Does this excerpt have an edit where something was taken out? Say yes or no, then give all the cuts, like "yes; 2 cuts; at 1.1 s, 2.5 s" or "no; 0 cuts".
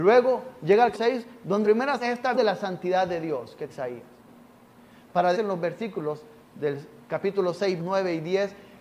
yes; 7 cuts; at 0.9 s, 1.6 s, 2.0 s, 2.3 s, 3.7 s, 5.3 s, 7.8 s